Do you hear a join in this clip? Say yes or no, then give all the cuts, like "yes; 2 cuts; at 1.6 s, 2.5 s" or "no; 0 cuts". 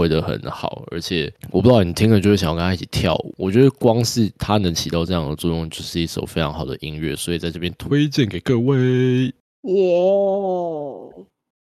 no; 0 cuts